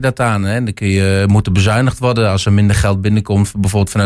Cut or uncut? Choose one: uncut